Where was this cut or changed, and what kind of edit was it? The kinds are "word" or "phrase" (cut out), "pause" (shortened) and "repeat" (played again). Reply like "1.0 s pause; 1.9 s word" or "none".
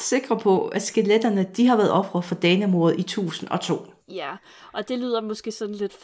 4.0 s pause